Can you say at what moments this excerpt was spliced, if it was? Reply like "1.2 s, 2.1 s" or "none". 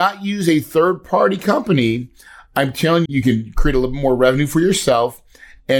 3.1 s